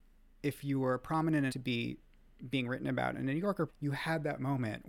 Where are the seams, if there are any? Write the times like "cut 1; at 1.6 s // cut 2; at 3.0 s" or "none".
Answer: cut 1; at 1.5 s // cut 2; at 3.7 s